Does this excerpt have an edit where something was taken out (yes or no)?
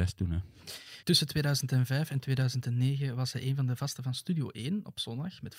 yes